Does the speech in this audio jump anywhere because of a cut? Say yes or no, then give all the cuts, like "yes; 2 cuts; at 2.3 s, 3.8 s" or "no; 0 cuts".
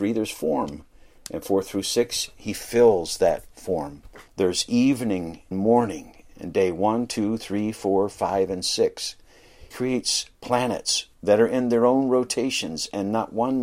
yes; 4 cuts; at 4.3 s, 5.5 s, 9.7 s, 11.1 s